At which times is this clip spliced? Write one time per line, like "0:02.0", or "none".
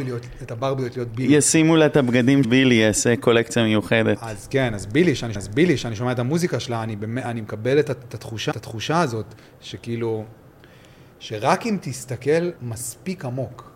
0:02.4
0:05.3
0:08.5
0:10.6
0:12.6

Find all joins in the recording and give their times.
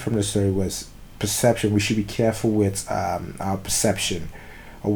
none

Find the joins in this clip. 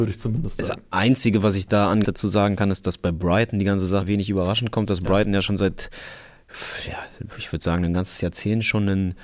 0:02.0
0:04.0

